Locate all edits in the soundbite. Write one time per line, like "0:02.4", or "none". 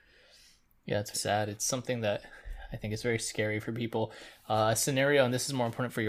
0:01.1